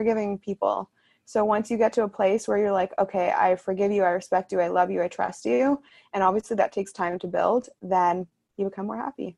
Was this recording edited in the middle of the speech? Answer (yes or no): no